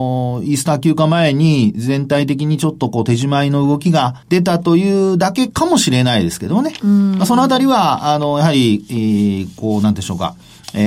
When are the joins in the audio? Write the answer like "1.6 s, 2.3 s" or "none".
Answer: 4.2 s